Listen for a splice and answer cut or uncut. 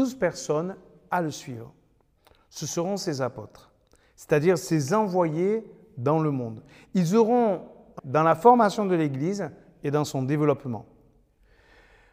cut